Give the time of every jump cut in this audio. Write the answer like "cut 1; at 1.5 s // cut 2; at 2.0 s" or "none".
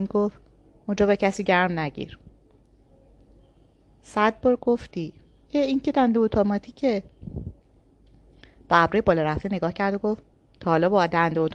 none